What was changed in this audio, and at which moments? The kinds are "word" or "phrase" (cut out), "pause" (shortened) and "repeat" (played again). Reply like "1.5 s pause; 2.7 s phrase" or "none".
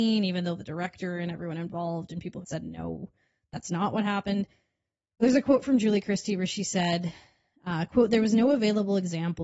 2.4 s phrase